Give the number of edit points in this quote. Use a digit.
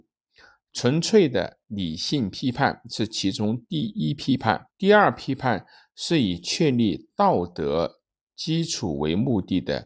1